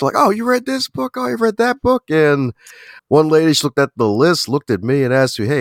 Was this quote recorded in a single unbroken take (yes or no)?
no